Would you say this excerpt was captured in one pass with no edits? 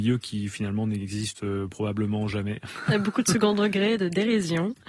yes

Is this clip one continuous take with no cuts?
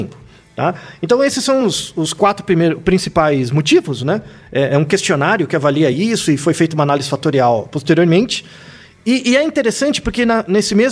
yes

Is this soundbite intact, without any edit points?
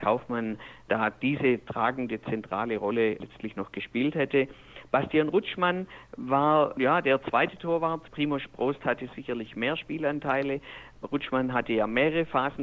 yes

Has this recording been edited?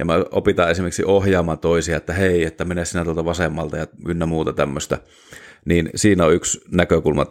no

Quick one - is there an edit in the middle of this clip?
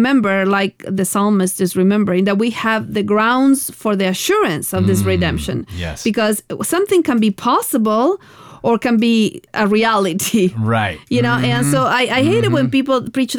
yes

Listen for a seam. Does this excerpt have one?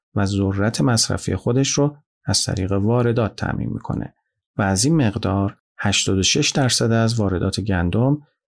no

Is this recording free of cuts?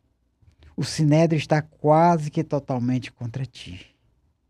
yes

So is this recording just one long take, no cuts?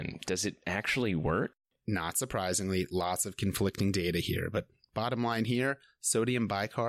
yes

